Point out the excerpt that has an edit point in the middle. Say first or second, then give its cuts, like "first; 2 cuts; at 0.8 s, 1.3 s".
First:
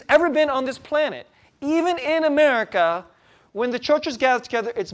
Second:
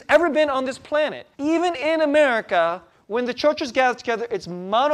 second; 2 cuts; at 1.3 s, 2.9 s